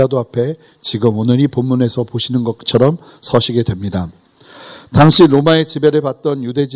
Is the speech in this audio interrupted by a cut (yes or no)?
no